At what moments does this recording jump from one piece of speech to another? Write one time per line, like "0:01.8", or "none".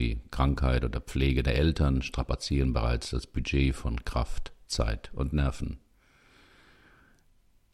none